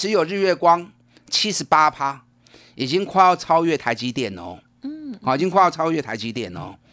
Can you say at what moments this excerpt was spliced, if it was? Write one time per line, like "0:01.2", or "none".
none